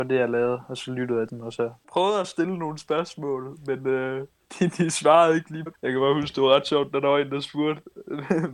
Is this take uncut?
no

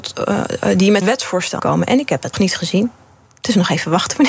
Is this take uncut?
no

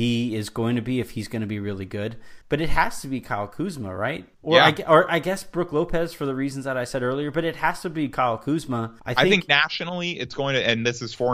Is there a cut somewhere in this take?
yes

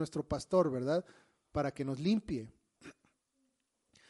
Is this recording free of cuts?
yes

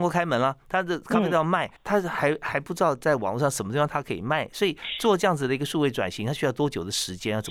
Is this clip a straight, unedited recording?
no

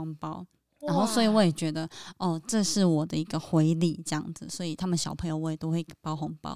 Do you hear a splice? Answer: no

